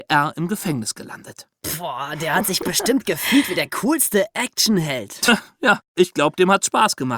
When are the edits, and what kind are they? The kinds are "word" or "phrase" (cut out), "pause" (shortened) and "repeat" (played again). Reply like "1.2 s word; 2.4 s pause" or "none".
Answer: 5.9 s pause